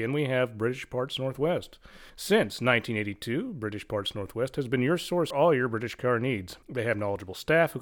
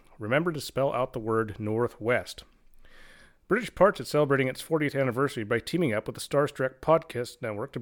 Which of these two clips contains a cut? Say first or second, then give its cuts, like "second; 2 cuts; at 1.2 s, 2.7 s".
first; 3 cuts; at 2.1 s, 5.3 s, 6.6 s